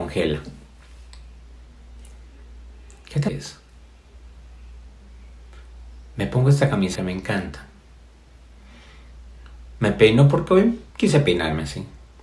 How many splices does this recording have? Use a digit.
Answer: 3